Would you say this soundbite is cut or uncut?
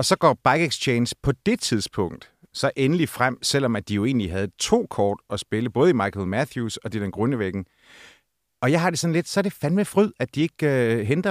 uncut